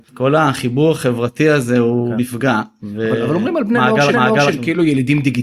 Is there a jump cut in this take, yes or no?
yes